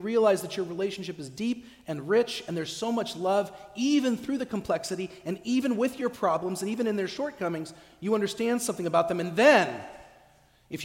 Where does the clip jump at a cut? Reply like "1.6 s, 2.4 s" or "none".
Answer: none